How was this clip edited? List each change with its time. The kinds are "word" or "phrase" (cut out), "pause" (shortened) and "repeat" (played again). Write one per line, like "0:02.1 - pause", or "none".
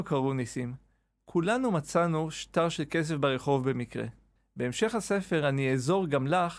0:04.4 - pause